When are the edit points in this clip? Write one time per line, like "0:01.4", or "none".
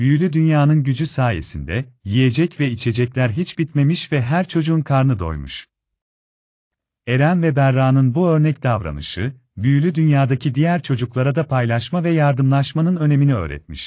none